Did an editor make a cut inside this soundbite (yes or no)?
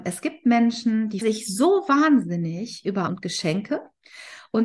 yes